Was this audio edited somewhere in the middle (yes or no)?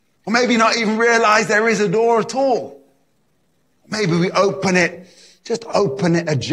yes